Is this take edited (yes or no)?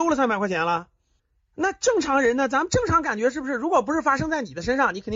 yes